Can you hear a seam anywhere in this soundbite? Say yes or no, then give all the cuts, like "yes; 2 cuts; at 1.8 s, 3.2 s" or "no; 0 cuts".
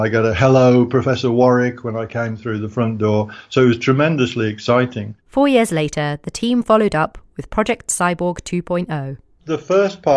no; 0 cuts